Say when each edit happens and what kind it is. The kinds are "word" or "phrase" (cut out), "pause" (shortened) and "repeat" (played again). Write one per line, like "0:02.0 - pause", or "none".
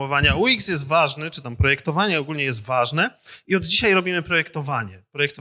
none